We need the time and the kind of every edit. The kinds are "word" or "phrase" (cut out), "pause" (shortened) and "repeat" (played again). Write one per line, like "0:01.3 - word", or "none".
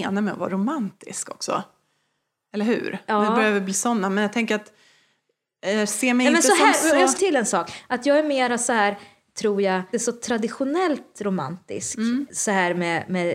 0:07.2 - word
0:09.9 - word